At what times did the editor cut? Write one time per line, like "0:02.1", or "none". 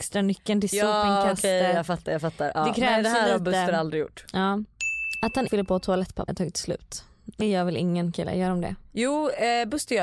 0:05.5
0:06.3
0:07.4